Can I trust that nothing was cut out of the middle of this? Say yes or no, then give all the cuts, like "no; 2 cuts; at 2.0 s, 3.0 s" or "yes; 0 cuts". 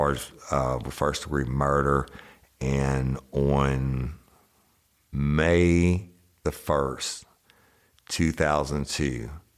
yes; 0 cuts